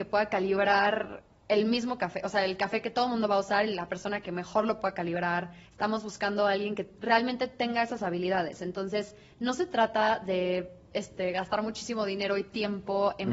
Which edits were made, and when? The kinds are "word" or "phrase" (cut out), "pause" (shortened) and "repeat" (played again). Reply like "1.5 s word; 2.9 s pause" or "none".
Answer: 5.7 s pause